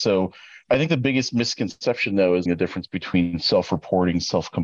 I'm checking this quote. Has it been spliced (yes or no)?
yes